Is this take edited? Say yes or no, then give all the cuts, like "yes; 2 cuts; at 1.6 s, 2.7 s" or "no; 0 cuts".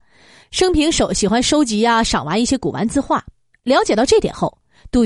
yes; 1 cut; at 3.5 s